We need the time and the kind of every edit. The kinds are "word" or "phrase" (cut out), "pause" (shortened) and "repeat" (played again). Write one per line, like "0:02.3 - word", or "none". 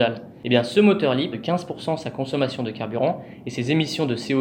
0:01.3 - phrase